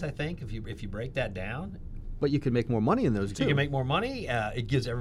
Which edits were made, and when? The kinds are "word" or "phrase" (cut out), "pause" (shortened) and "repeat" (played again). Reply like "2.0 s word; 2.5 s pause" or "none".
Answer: 3.3 s word